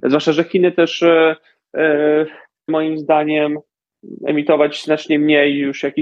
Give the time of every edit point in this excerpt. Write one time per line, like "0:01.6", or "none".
0:02.7

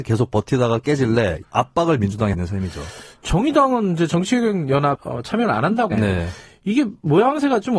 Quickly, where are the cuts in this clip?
0:01.4
0:02.3
0:05.0
0:05.9

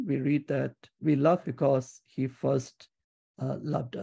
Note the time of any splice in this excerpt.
0:01.0
0:01.4

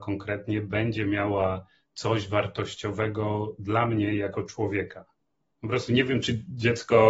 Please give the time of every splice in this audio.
none

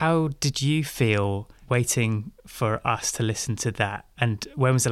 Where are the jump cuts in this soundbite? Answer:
none

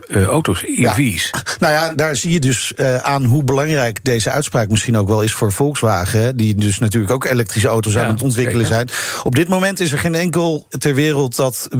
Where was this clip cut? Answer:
0:01.9
0:10.7

